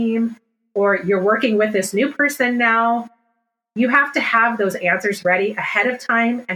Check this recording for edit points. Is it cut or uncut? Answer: uncut